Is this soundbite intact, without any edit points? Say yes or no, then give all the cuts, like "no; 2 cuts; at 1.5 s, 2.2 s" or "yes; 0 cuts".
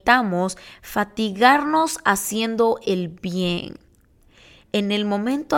yes; 0 cuts